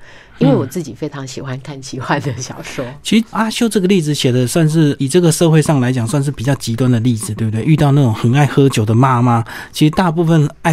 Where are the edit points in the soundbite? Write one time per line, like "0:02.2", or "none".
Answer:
0:03.3
0:05.0